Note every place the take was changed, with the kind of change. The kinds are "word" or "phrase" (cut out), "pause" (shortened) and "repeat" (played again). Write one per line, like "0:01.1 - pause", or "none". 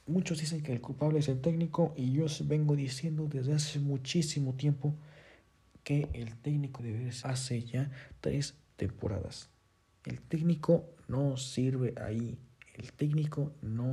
0:06.8 - word
0:07.2 - word

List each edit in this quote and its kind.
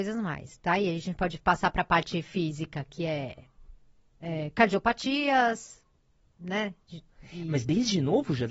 none

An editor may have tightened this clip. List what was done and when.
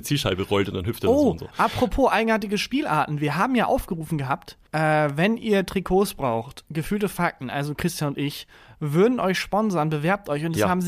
0:04.7 - pause

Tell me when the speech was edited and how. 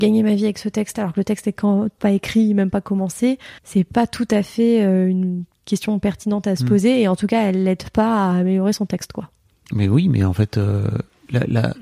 0:02.0 - word
0:03.6 - pause

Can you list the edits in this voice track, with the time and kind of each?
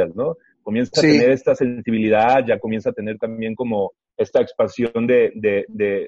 none

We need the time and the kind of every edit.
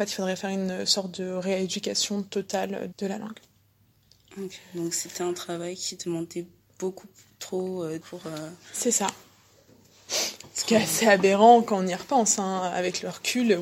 0:02.9 - word
0:08.0 - word

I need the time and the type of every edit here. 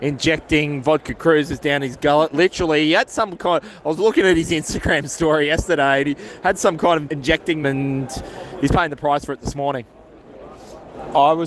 0:07.1 - word
0:07.6 - word

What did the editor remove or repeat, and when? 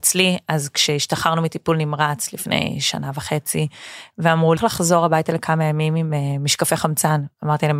0:04.6 - phrase

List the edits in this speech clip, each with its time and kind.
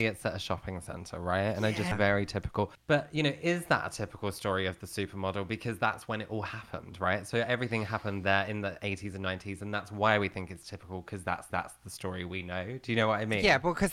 0:01.9 - word
0:02.7 - pause
0:11.5 - repeat

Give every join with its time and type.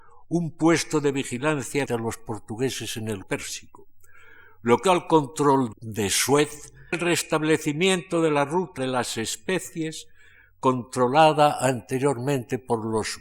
0:01.9 - word
0:03.2 - word
0:04.8 - word
0:05.7 - word
0:06.9 - word
0:08.8 - word

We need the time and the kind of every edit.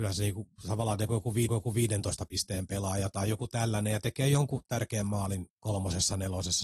0:01.5 - repeat
0:05.6 - pause

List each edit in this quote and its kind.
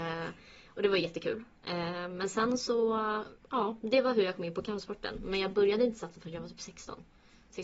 0:03.4 - pause

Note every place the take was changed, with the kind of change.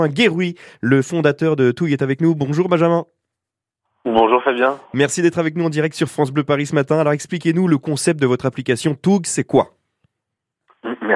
none

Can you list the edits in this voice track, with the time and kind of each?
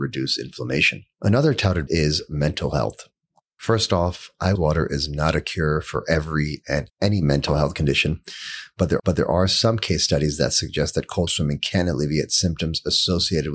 0:01.1 - pause
0:01.9 - word
0:03.3 - pause
0:04.5 - phrase
0:06.9 - word
0:09.0 - repeat
0:11.3 - word

